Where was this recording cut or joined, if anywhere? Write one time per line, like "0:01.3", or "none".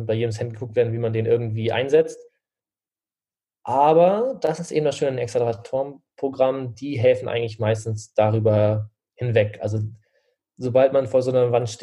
none